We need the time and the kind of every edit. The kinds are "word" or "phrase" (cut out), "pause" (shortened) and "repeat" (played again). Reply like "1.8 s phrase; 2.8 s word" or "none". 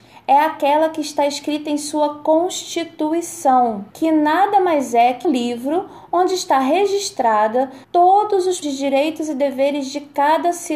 3.9 s pause; 5.2 s word; 7.8 s pause; 8.6 s word